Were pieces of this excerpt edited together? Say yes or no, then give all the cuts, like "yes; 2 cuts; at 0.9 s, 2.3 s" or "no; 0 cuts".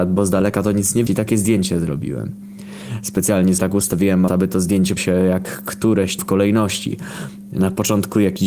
yes; 5 cuts; at 1.1 s, 3.6 s, 4.3 s, 5.0 s, 6.2 s